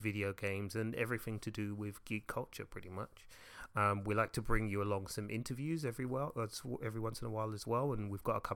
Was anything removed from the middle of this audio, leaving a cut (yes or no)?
no